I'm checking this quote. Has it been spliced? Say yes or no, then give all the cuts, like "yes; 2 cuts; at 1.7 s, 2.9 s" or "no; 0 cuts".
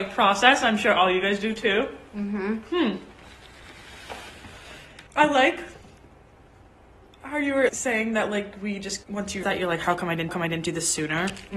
yes; 5 cuts; at 5.1 s, 7.7 s, 9.0 s, 9.4 s, 10.3 s